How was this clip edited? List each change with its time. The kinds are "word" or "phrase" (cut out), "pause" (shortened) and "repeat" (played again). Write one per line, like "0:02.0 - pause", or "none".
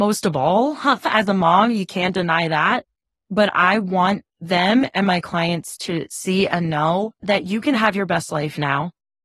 0:07.2 - pause